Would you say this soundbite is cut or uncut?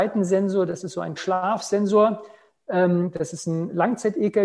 cut